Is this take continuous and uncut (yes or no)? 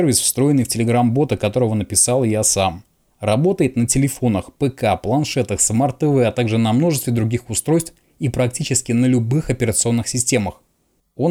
yes